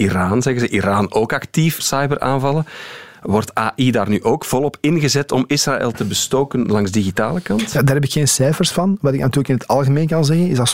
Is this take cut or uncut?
cut